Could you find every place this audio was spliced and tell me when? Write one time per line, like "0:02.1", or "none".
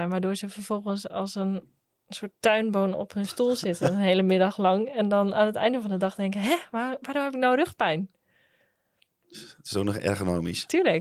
none